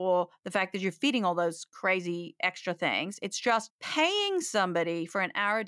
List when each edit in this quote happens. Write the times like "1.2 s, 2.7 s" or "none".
3.7 s